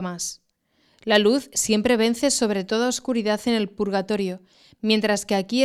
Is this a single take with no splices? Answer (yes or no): yes